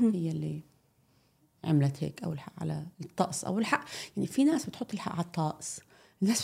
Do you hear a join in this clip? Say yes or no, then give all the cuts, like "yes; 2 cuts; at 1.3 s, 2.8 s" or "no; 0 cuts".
yes; 1 cut; at 2.9 s